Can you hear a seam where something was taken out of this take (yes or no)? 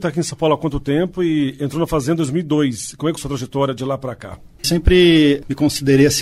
yes